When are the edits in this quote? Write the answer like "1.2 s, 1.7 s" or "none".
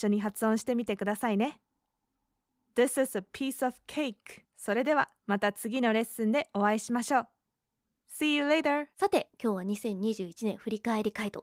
4.4 s, 5.2 s, 8.9 s